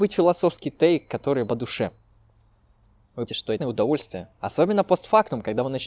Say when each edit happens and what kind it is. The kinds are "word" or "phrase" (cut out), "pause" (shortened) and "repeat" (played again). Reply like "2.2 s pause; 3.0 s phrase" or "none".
1.5 s word; 3.3 s word; 3.6 s word

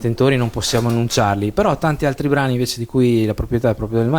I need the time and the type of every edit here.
none

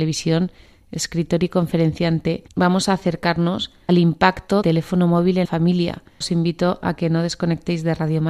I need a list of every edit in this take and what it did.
2.5 s pause; 3.9 s word; 4.6 s word; 5.4 s word

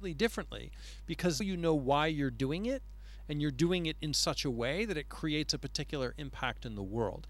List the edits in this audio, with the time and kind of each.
1.4 s word

